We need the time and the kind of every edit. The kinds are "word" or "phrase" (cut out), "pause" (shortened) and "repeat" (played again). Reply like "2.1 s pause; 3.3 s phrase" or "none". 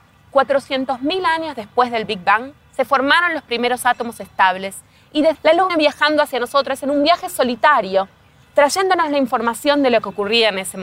5.3 s word; 5.7 s word